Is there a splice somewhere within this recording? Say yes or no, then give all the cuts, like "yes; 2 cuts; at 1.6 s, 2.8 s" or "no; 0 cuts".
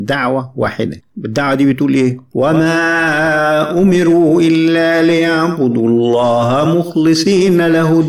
no; 0 cuts